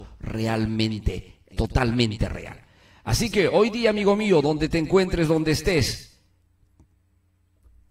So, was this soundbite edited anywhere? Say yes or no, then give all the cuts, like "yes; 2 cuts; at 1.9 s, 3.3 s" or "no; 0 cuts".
yes; 1 cut; at 1.5 s